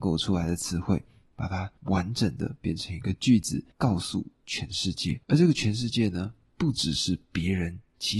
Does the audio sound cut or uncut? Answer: cut